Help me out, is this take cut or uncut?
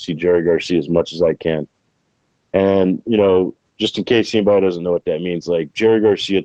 uncut